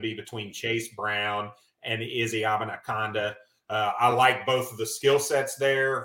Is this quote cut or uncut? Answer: uncut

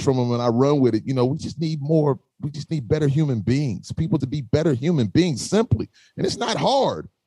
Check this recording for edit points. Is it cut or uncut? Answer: cut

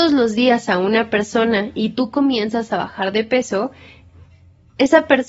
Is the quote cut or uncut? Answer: uncut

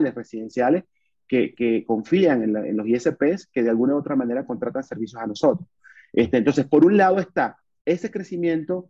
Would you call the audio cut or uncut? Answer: cut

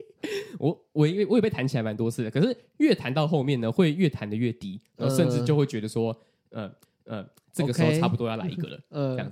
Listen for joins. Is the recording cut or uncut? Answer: cut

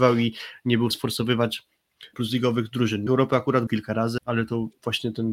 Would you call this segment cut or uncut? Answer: cut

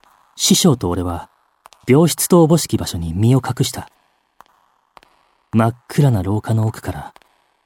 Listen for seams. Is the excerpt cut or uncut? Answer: uncut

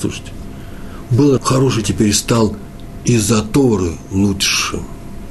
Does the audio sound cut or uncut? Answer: cut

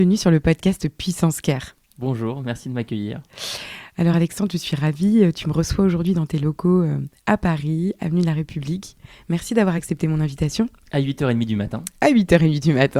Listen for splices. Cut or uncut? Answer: uncut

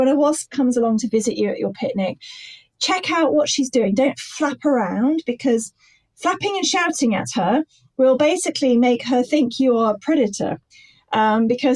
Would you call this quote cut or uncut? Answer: uncut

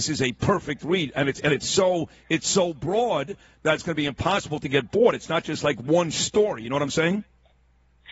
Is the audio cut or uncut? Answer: uncut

